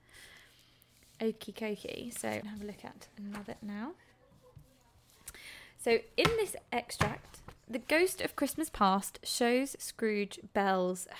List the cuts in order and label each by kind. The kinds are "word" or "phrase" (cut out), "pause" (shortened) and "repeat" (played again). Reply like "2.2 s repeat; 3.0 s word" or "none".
2.4 s word; 3.6 s word